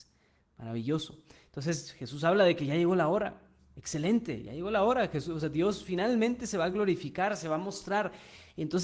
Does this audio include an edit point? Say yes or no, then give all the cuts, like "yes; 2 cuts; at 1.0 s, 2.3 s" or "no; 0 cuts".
no; 0 cuts